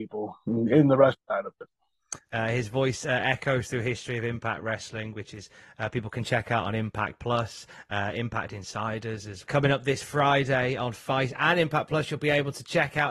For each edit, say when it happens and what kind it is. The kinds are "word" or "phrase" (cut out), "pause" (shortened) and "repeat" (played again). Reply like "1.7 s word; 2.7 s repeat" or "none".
1.2 s pause; 9.5 s word